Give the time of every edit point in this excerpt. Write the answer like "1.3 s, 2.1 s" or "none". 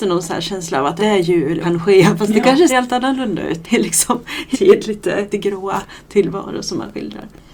1.0 s, 1.6 s, 2.7 s, 3.6 s, 4.5 s, 5.3 s